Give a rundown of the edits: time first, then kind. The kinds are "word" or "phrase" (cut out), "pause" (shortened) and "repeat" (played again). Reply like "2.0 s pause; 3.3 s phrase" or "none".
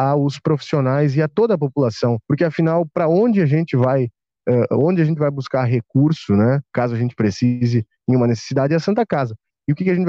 2.2 s pause; 6.7 s pause